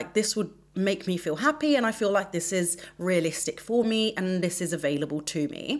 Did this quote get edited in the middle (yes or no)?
no